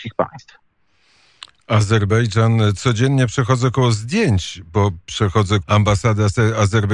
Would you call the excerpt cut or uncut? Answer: cut